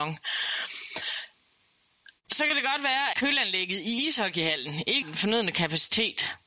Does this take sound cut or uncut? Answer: cut